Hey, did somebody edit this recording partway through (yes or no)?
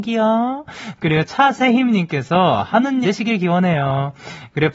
yes